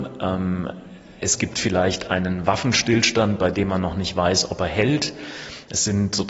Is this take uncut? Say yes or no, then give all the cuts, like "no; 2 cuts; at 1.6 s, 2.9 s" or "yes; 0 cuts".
yes; 0 cuts